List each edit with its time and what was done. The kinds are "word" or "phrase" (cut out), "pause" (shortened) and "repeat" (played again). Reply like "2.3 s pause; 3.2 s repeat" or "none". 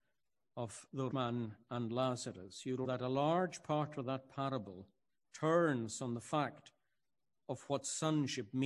1.1 s word; 2.8 s word; 5.1 s pause